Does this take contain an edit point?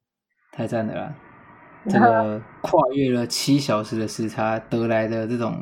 no; 0 cuts

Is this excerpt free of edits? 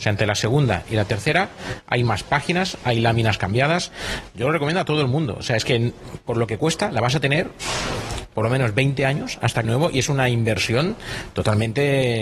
no; 1 cut; at 9.6 s

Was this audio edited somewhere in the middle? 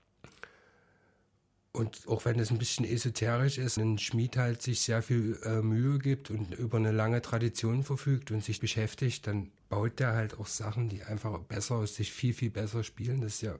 yes; 4 cuts; at 2.1 s, 3.8 s, 8.6 s, 9.6 s

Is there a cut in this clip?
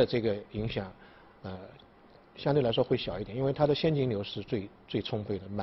no; 0 cuts

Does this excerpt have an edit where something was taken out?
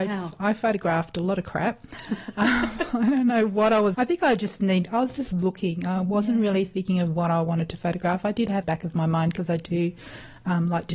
yes; 2 cuts; at 3.9 s, 8.6 s

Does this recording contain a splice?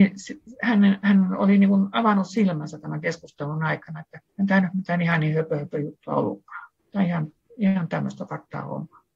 yes; 2 cuts; at 4.3 s, 6.8 s

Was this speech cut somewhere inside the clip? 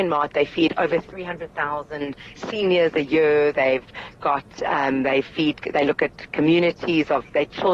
no; 0 cuts

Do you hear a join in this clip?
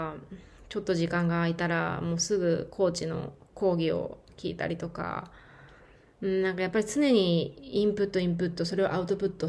no; 0 cuts

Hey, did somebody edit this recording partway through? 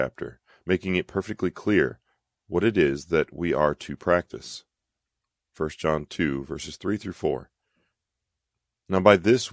no; 0 cuts

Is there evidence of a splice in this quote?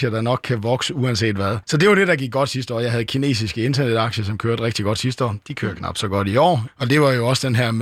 no; 0 cuts

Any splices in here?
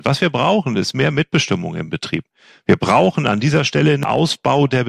no; 0 cuts

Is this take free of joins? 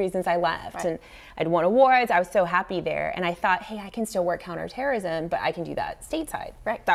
yes; 0 cuts

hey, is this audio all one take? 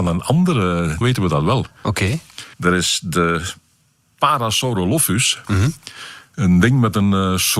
no; 2 cuts; at 1.0 s, 2.5 s

